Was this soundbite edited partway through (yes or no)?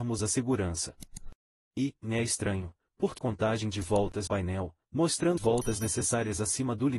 yes